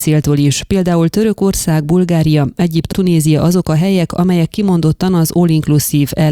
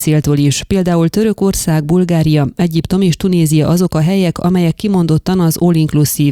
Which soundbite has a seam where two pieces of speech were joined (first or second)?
first